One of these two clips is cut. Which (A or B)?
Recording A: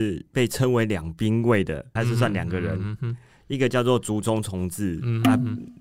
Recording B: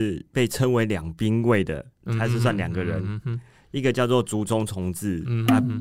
A